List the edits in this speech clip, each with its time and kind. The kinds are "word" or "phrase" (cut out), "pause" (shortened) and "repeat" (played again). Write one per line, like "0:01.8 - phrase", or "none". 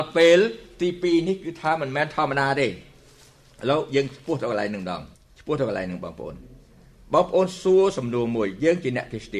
0:05.1 - pause